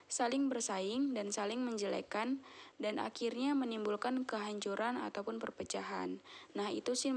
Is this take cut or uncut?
uncut